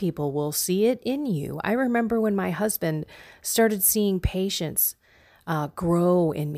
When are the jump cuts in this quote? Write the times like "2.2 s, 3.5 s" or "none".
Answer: none

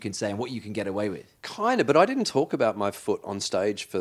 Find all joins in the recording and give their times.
1.4 s

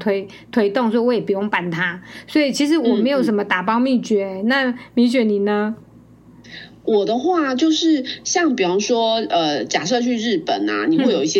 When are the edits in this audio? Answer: none

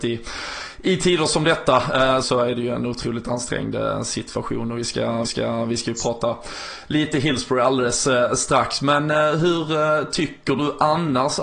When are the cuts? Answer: 2.2 s, 5.2 s

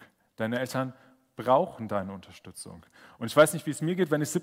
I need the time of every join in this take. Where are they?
none

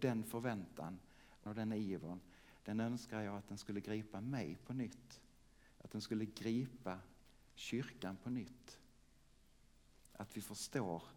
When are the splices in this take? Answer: 1.5 s

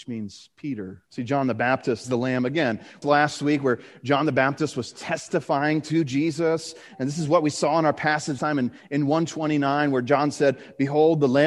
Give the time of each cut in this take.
1.1 s, 2.0 s, 3.0 s, 8.4 s

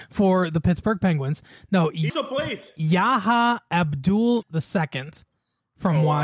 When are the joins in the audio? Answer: 2.1 s, 4.4 s

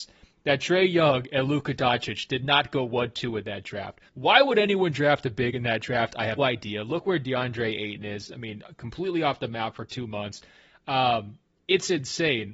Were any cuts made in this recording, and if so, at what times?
4.1 s, 6.4 s

